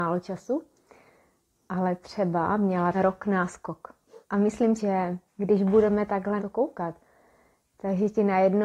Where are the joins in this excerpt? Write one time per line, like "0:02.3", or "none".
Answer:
0:02.9
0:04.2
0:04.8
0:05.3
0:06.4